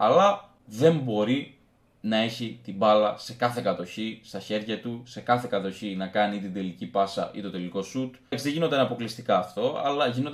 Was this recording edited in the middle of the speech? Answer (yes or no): no